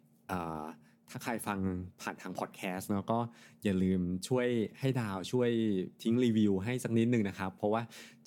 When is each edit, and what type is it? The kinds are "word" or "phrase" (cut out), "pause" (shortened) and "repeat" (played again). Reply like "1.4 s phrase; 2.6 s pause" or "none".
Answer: none